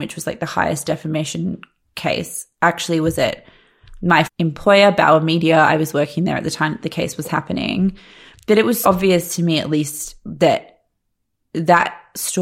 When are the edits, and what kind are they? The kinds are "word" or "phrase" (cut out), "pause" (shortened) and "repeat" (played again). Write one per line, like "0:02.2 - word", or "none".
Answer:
0:04.3 - word
0:08.8 - word